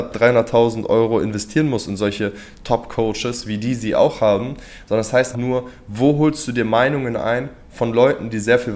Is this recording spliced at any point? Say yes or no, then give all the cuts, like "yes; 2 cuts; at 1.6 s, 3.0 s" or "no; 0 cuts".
yes; 1 cut; at 5.3 s